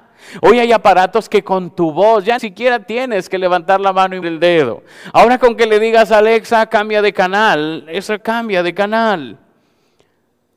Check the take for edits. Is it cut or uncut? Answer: cut